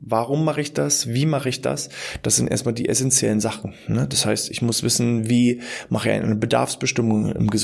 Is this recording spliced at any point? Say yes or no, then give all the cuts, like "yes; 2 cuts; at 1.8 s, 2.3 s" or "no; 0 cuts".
no; 0 cuts